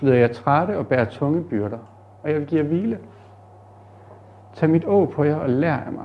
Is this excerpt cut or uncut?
uncut